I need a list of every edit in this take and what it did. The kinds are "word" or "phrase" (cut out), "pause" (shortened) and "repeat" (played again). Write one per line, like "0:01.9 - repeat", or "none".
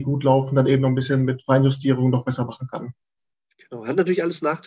none